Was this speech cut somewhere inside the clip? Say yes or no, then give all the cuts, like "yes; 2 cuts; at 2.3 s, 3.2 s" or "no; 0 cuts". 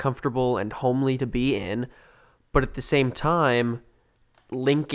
no; 0 cuts